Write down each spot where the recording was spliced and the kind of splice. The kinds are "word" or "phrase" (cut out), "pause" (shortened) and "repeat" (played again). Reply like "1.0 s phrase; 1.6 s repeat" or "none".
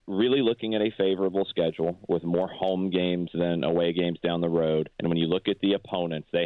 4.9 s pause

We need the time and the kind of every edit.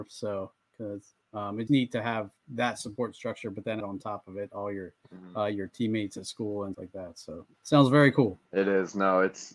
1.2 s pause; 1.7 s word; 3.8 s word; 6.7 s word; 7.5 s pause; 8.4 s pause

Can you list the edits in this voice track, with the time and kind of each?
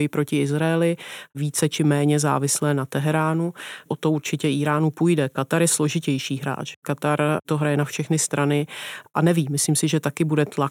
3.9 s word

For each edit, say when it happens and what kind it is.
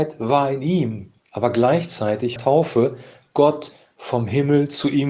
1.2 s pause; 2.4 s phrase

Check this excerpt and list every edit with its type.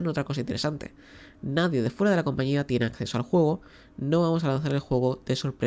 none

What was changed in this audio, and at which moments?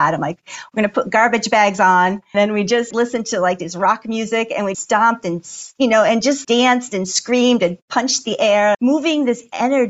2.3 s word; 2.9 s word; 4.7 s word; 6.4 s word; 8.7 s word

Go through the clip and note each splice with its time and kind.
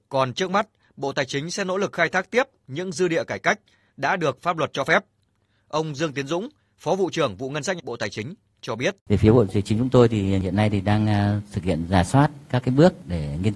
7.8 s word; 9.0 s pause

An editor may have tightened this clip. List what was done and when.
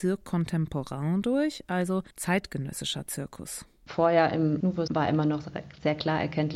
2.1 s pause; 4.9 s word

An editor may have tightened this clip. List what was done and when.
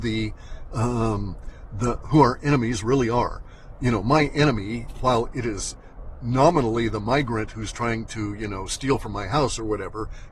none

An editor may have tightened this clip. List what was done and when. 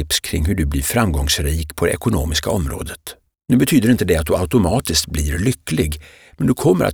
3.3 s pause

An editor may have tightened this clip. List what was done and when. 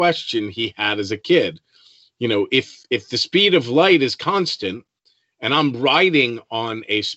none

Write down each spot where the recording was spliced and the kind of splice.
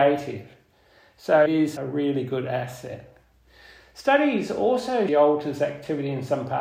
1.5 s word; 1.8 s word; 5.1 s phrase

